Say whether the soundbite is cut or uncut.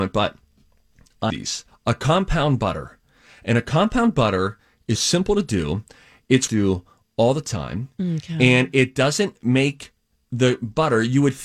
cut